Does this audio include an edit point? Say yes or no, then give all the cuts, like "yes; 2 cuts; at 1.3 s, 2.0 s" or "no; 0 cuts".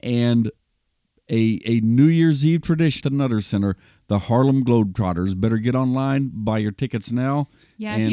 yes; 1 cut; at 3.0 s